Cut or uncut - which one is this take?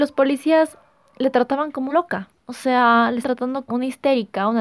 cut